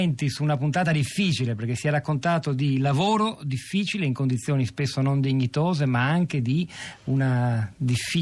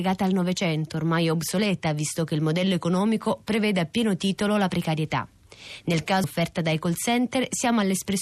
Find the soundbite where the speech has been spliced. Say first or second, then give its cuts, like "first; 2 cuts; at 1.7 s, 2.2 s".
second; 1 cut; at 6.2 s